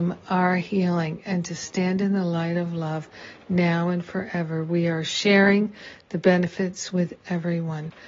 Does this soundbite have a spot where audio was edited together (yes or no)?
no